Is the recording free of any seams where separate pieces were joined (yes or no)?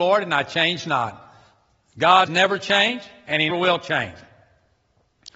no